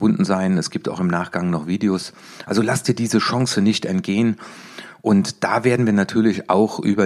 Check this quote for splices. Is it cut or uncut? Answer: uncut